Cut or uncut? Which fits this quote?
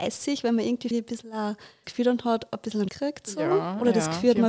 cut